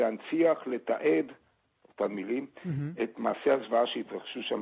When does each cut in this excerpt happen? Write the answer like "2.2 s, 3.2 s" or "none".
none